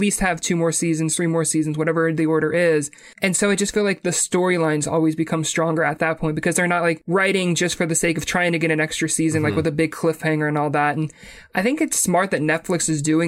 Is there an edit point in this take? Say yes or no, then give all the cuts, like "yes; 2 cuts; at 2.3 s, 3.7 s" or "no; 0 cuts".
yes; 1 cut; at 3.1 s